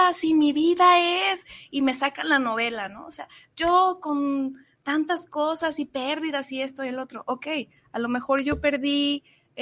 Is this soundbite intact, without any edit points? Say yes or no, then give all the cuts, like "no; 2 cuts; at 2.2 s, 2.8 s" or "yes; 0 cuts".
yes; 0 cuts